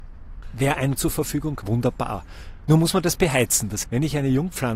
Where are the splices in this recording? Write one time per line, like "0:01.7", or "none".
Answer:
0:01.0
0:01.6
0:03.8